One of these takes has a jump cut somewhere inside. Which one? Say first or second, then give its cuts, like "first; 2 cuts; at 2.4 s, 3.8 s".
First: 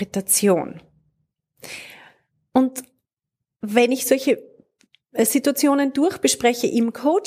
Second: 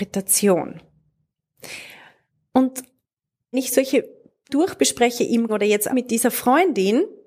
second; 4 cuts; at 3.5 s, 4.5 s, 5.5 s, 5.9 s